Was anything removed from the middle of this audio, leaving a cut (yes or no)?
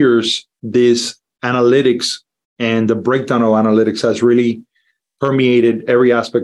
no